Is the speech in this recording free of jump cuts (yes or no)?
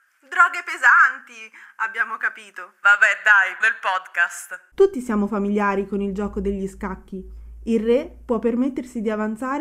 no